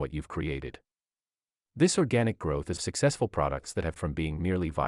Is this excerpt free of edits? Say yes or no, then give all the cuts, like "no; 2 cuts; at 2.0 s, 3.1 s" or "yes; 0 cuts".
no; 2 cuts; at 2.8 s, 4.0 s